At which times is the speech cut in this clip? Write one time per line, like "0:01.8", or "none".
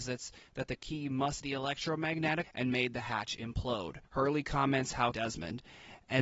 0:01.4
0:02.4
0:04.0
0:05.1